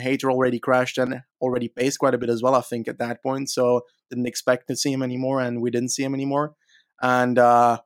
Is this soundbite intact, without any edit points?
yes; 0 cuts

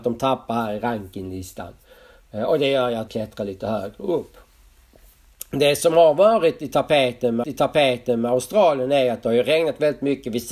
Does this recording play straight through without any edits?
no; 2 cuts; at 3.1 s, 7.4 s

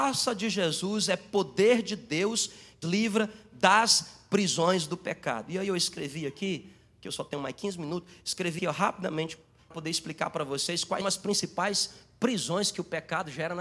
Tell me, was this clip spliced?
yes; 4 cuts; at 2.8 s, 8.6 s, 9.7 s, 11.0 s

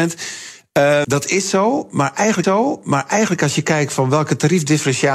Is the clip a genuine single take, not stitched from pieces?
no; 2 cuts; at 1.0 s, 2.4 s

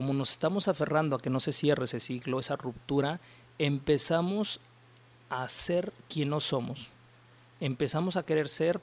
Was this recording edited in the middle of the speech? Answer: no; 0 cuts

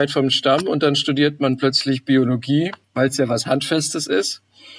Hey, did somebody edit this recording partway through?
yes; 1 cut; at 2.8 s

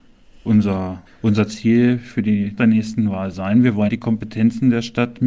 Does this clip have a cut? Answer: yes; 3 cuts; at 1.1 s, 2.6 s, 3.9 s

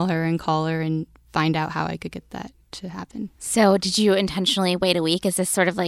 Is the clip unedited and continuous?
no; 2 cuts; at 2.6 s, 3.4 s

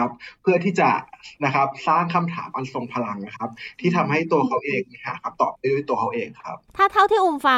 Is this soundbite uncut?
no; 2 cuts; at 1.3 s, 6.7 s

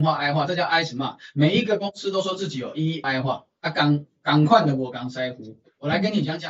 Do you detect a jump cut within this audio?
yes; 1 cut; at 3.0 s

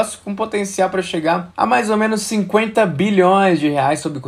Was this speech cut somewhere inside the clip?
yes; 1 cut; at 1.5 s

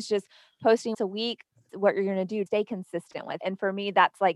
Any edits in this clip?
yes; 4 cuts; at 0.9 s, 1.7 s, 2.5 s, 3.4 s

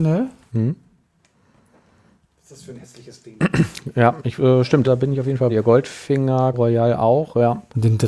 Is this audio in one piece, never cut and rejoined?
no; 4 cuts; at 4.4 s, 4.8 s, 5.5 s, 6.5 s

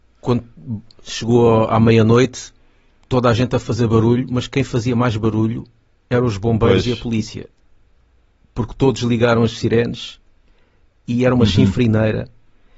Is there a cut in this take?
no; 0 cuts

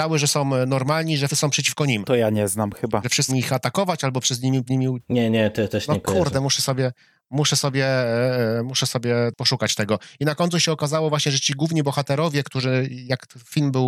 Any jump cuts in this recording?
yes; 4 cuts; at 1.3 s, 3.3 s, 4.7 s, 5.7 s

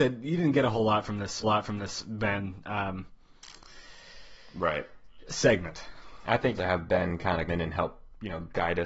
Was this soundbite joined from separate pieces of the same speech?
yes; 3 cuts; at 1.4 s, 6.6 s, 7.5 s

